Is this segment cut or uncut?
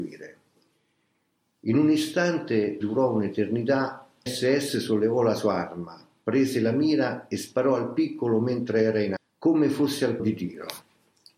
cut